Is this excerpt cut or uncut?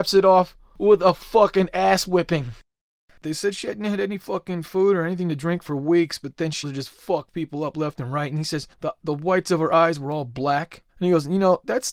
cut